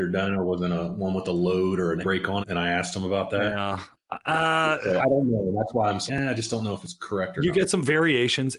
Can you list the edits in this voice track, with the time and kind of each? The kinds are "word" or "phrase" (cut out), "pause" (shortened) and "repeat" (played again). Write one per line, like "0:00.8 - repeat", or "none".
0:02.0 - word
0:02.4 - word
0:05.0 - word
0:06.1 - word